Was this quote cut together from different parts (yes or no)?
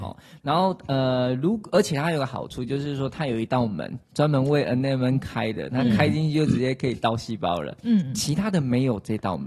yes